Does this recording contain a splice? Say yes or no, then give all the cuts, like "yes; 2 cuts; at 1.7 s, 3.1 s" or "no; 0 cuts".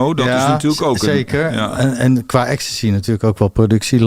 no; 0 cuts